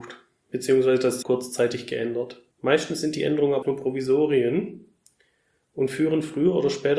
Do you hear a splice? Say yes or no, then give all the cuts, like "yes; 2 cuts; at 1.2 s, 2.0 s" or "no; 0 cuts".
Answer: yes; 3 cuts; at 1.2 s, 2.5 s, 3.6 s